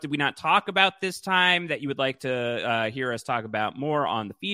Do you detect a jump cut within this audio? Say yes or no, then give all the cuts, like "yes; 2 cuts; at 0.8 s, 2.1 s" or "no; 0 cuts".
no; 0 cuts